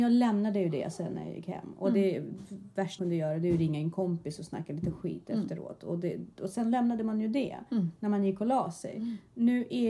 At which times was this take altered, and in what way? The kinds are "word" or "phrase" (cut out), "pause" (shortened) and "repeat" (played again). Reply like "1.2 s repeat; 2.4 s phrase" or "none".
3.0 s word

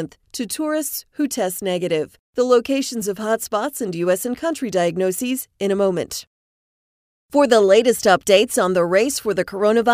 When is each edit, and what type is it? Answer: none

